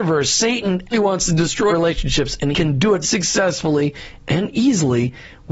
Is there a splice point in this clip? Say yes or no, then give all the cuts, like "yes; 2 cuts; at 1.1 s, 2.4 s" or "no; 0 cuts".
yes; 4 cuts; at 0.9 s, 1.7 s, 2.5 s, 3.0 s